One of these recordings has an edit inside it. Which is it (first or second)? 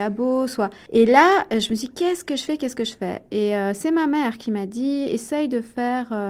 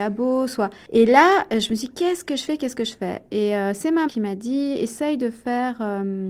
second